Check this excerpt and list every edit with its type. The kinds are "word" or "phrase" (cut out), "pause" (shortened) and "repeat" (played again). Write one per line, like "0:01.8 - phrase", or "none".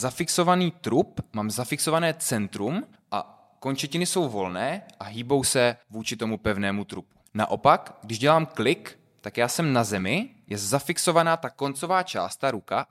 0:03.0 - pause
0:05.8 - pause
0:07.3 - pause